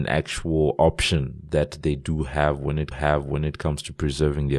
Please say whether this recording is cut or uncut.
cut